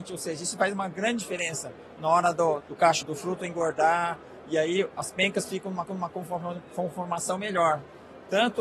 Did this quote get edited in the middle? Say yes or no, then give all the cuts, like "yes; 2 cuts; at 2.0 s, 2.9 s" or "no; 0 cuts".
yes; 3 cuts; at 2.6 s, 3.0 s, 5.9 s